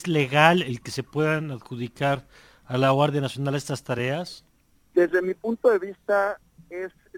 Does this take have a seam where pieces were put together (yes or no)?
no